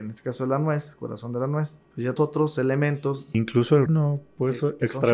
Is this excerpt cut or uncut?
cut